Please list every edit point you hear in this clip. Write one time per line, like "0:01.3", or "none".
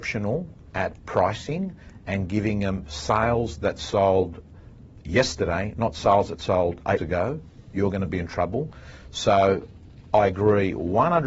0:07.0